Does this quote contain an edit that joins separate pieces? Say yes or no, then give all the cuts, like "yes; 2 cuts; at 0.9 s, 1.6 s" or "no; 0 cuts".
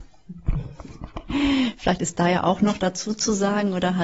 no; 0 cuts